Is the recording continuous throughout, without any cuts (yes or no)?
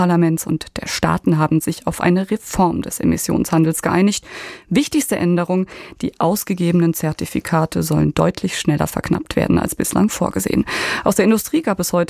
yes